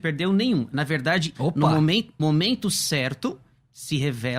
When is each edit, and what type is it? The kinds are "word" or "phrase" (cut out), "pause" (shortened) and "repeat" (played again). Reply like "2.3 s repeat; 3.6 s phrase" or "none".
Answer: 1.3 s word; 2.2 s word

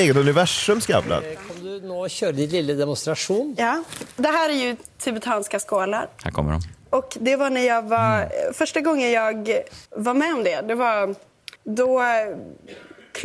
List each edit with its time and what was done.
9.9 s pause; 11.6 s pause

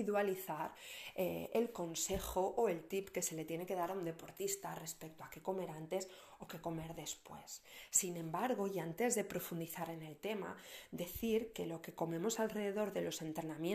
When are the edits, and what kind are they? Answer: none

